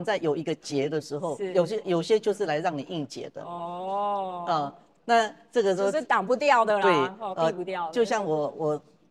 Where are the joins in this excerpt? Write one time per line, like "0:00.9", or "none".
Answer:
none